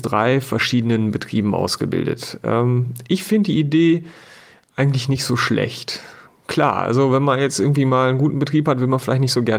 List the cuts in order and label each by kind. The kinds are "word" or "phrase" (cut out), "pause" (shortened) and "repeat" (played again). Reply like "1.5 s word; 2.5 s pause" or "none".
none